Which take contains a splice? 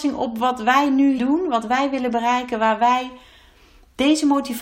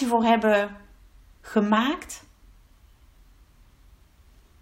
first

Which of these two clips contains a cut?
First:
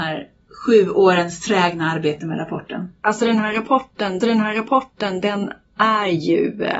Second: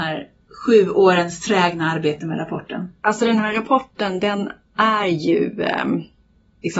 first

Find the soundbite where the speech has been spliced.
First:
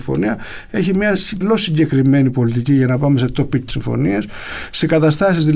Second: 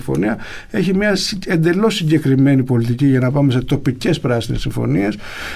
first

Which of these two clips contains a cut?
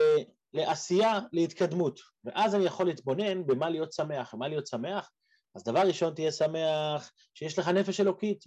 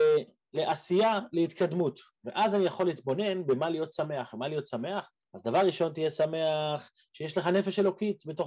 second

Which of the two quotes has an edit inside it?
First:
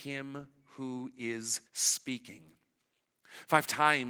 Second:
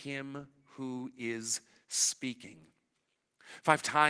first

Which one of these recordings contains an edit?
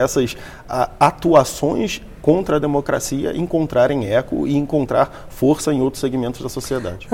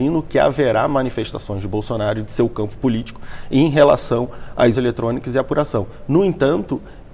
second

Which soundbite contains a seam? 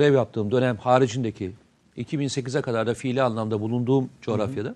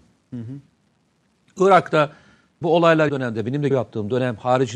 second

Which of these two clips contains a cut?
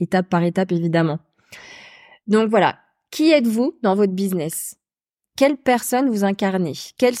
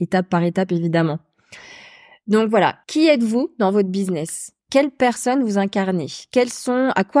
second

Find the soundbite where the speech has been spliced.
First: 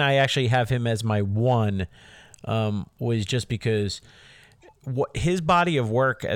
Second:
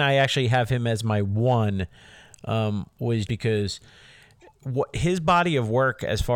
second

